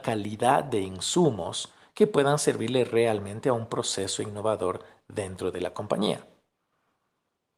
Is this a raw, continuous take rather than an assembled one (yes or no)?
yes